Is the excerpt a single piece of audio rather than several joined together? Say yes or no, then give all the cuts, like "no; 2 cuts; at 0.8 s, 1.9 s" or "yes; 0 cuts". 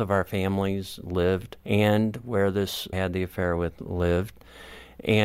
no; 2 cuts; at 1.6 s, 2.9 s